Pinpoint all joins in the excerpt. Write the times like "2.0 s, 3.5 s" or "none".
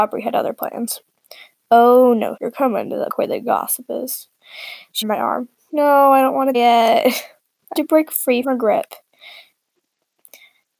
2.4 s, 3.1 s, 5.0 s, 6.5 s, 7.8 s, 8.4 s